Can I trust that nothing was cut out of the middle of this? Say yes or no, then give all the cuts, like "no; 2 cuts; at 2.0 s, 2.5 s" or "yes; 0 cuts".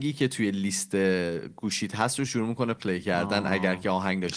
yes; 0 cuts